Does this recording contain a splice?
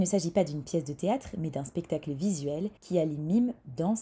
yes; 1 cut; at 2.8 s

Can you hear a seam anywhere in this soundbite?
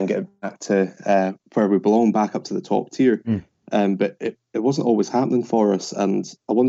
no; 0 cuts

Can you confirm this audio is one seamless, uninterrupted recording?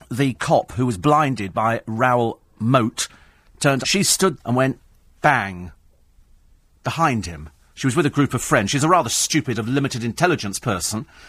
no; 3 cuts; at 3.8 s, 4.4 s, 5.2 s

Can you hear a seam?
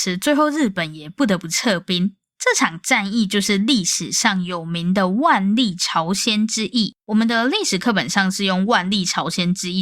yes; 1 cut; at 7.0 s

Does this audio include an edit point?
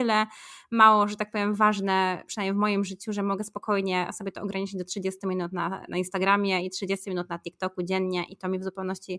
no; 0 cuts

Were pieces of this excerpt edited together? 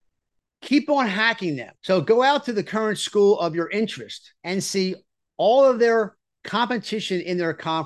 yes; 2 cuts; at 1.8 s, 4.4 s

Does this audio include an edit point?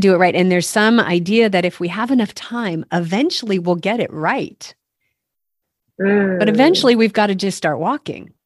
no; 0 cuts

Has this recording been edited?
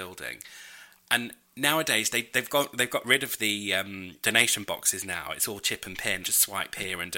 yes; 2 cuts; at 1.5 s, 6.2 s

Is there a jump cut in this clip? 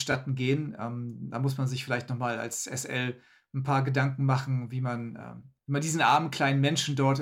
no; 0 cuts

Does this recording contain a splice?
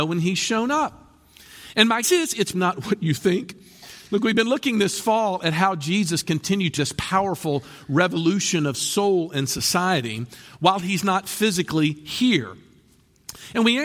yes; 4 cuts; at 2.0 s, 2.5 s, 6.2 s, 6.8 s

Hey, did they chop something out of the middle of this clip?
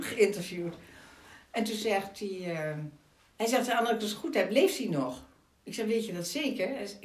no; 0 cuts

